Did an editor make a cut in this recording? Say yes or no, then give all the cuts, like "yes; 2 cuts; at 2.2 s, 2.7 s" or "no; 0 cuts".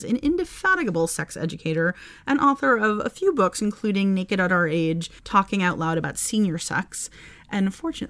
yes; 1 cut; at 5.2 s